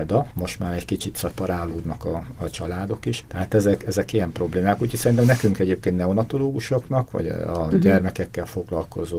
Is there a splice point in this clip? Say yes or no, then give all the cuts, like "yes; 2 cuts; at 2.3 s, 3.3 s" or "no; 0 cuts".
no; 0 cuts